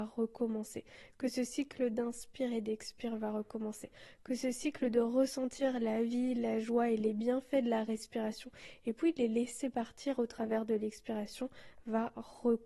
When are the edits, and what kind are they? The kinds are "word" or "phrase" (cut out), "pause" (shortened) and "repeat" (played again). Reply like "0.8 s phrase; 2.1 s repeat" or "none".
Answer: none